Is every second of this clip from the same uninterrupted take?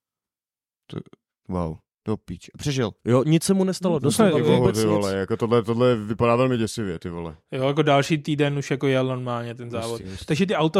no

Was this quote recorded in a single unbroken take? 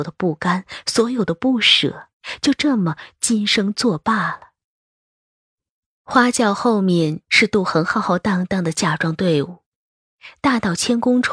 yes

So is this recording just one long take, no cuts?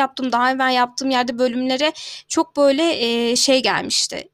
yes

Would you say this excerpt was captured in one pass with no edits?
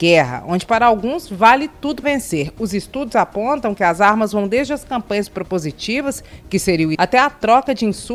no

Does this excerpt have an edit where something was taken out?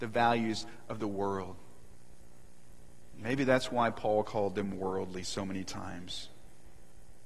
no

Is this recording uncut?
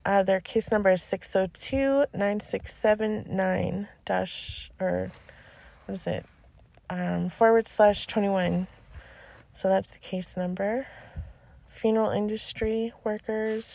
yes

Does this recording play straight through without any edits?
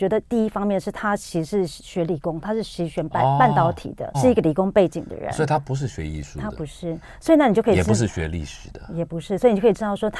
no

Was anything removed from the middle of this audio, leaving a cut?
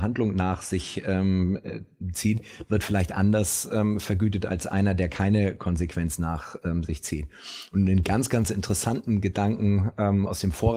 no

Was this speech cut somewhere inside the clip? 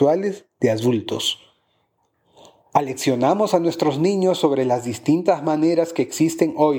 no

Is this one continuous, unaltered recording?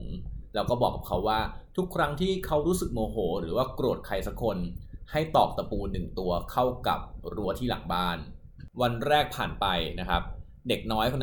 no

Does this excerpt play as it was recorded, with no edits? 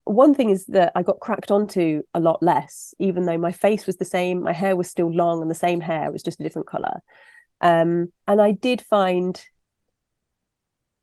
no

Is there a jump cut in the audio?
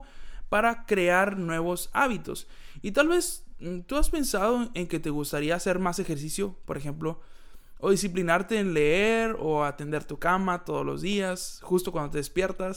no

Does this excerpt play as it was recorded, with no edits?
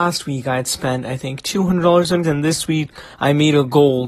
no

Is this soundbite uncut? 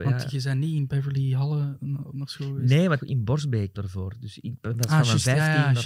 no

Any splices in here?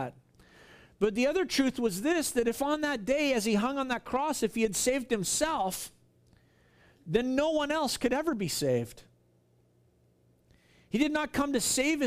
no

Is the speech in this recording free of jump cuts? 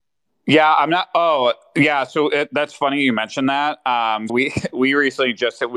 no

